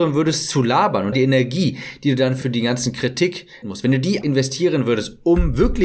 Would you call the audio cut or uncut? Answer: cut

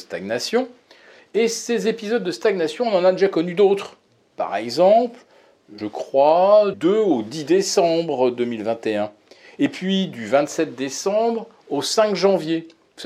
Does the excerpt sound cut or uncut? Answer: cut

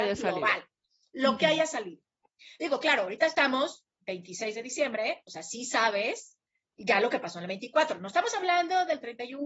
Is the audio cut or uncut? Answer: uncut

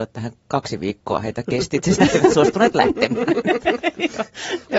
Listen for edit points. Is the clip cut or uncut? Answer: cut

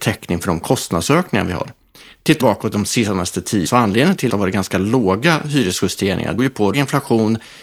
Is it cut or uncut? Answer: cut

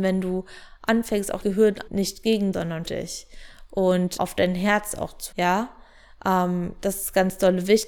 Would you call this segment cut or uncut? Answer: cut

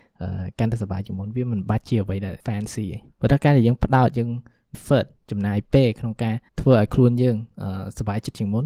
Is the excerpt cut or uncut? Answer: cut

